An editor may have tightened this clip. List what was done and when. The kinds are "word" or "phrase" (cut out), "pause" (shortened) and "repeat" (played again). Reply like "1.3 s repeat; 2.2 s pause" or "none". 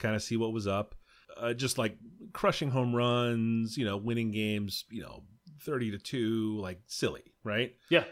none